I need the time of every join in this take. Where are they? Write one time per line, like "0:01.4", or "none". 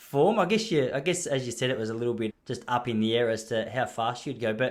0:02.3